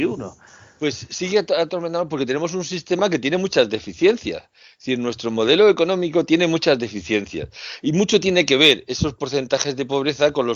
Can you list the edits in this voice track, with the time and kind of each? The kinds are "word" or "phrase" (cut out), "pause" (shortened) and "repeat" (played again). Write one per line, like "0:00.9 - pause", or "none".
none